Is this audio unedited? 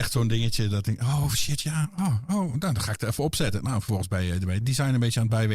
yes; 0 cuts

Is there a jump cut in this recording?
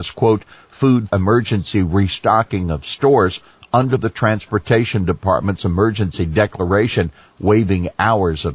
yes; 1 cut; at 1.1 s

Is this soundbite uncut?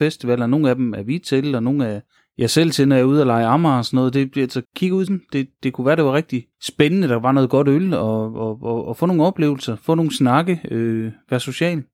no; 4 cuts; at 2.2 s, 4.6 s, 5.1 s, 6.5 s

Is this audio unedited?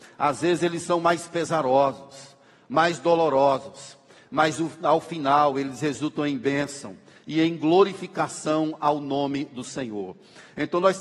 yes; 0 cuts

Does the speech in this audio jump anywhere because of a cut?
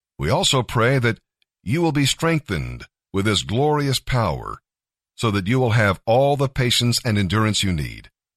no; 0 cuts

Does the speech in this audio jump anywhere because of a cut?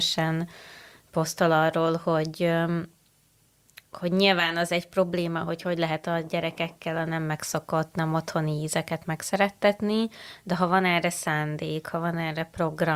no; 0 cuts

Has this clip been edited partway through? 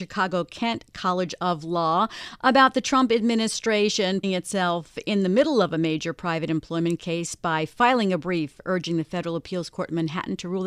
yes; 1 cut; at 4.2 s

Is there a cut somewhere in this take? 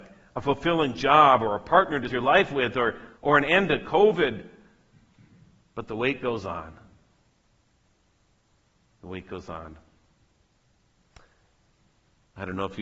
yes; 2 cuts; at 2.1 s, 3.2 s

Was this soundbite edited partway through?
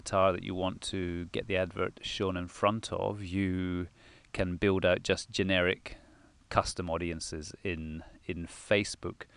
no; 0 cuts

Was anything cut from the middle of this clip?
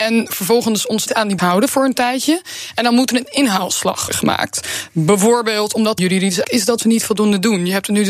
yes; 5 cuts; at 1.1 s, 1.4 s, 4.1 s, 6.0 s, 6.4 s

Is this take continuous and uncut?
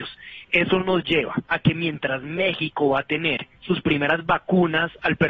no; 2 cuts; at 1.4 s, 3.5 s

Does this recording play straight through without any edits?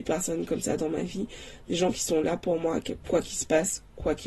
yes; 0 cuts

